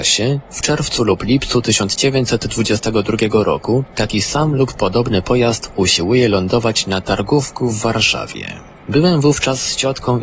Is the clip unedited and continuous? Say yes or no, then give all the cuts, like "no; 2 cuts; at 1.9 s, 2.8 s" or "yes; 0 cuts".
yes; 0 cuts